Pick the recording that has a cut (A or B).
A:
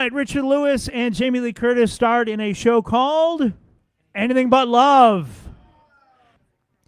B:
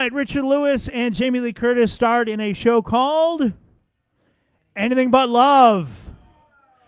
A